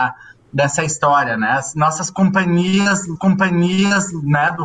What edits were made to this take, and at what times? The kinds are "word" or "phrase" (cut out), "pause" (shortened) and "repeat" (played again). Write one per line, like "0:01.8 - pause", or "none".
0:03.2 - repeat